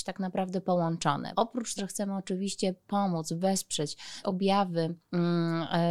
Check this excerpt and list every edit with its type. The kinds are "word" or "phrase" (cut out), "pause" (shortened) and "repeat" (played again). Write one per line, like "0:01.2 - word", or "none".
0:01.3 - word
0:01.8 - word
0:04.2 - word